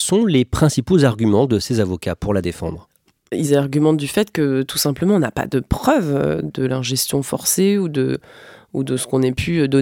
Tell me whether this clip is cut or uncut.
uncut